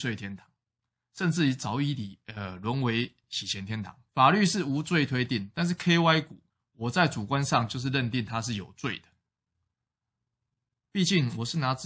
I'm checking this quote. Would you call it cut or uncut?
cut